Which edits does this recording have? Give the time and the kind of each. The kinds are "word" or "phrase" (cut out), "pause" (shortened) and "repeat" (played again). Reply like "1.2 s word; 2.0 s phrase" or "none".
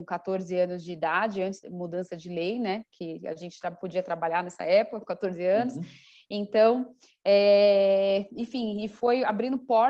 1.6 s word